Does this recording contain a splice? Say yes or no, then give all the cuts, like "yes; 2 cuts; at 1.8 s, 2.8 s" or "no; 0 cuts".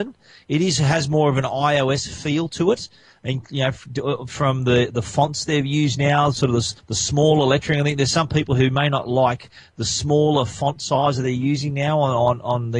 yes; 1 cut; at 6.8 s